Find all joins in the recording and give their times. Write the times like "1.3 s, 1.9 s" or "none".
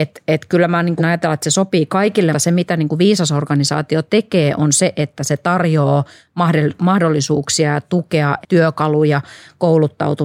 1.0 s, 2.3 s, 8.4 s